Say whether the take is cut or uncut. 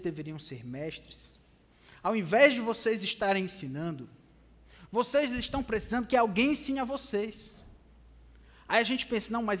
uncut